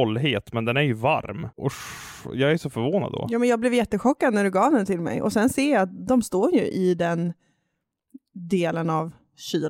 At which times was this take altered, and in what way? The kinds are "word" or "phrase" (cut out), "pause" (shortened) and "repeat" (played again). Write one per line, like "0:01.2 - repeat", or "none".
0:01.5 - pause